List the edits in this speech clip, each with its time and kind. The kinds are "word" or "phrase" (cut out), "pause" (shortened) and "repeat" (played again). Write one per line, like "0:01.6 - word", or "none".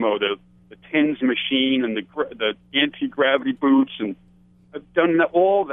none